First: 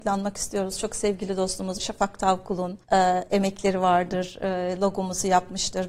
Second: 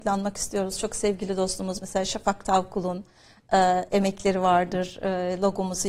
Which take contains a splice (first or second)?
first